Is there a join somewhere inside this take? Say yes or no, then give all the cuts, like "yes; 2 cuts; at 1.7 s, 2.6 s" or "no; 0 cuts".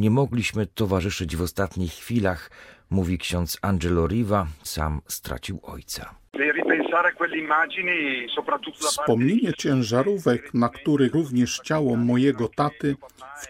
yes; 3 cuts; at 4.6 s, 9.5 s, 11.1 s